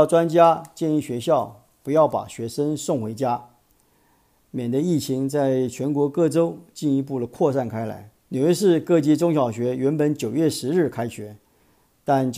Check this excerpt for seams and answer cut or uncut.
cut